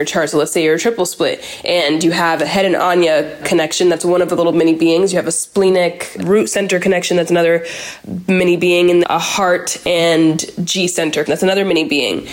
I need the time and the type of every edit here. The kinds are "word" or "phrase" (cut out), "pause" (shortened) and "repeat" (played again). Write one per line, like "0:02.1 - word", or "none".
0:09.0 - word
0:11.3 - word